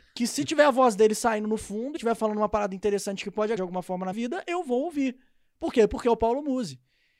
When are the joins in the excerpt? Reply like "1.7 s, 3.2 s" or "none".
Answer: 2.0 s, 3.6 s, 4.1 s